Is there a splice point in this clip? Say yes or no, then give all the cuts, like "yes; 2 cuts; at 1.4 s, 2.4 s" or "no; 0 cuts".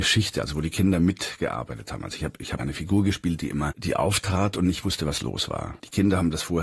yes; 1 cut; at 2.6 s